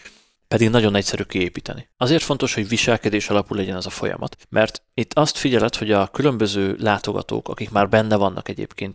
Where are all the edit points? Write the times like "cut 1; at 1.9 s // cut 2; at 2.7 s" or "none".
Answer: cut 1; at 1.9 s // cut 2; at 4.4 s